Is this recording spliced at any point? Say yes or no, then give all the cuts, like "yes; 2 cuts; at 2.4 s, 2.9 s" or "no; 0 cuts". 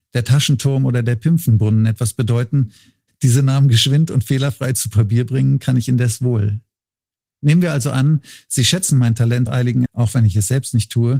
yes; 2 cuts; at 9.5 s, 9.9 s